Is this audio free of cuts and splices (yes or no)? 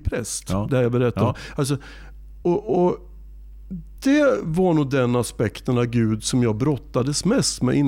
yes